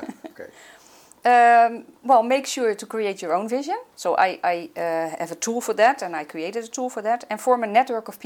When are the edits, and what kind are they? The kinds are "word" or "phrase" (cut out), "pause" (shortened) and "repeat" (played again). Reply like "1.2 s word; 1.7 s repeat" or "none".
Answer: 1.9 s pause; 3.9 s pause